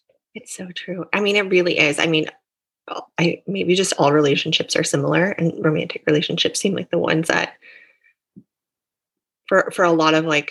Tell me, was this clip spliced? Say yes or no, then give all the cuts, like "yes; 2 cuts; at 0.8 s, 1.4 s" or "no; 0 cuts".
no; 0 cuts